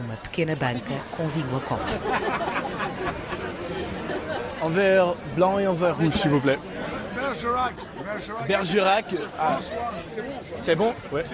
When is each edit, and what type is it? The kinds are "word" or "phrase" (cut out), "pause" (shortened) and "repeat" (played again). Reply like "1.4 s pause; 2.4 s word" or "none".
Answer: none